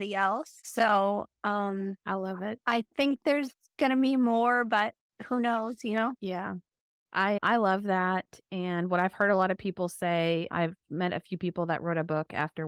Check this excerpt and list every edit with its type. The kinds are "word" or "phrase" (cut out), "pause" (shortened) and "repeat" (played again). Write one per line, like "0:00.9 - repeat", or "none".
none